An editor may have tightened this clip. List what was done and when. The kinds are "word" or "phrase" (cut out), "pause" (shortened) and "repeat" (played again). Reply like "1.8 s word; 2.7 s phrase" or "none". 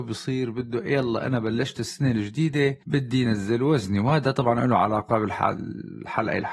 none